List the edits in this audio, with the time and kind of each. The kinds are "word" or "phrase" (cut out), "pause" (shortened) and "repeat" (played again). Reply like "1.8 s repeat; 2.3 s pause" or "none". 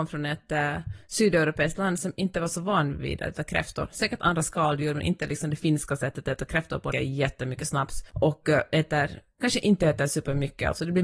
6.9 s phrase; 8.1 s pause